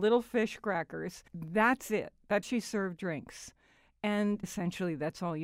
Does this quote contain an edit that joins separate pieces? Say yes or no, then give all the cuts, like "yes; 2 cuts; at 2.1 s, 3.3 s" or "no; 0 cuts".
yes; 4 cuts; at 1.3 s, 2.4 s, 3.0 s, 4.4 s